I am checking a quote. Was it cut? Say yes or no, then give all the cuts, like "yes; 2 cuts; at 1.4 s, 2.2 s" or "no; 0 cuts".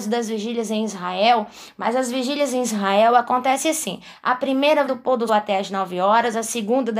yes; 2 cuts; at 4.9 s, 5.3 s